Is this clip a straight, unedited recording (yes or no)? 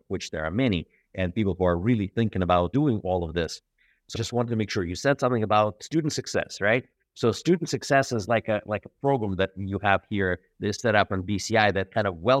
no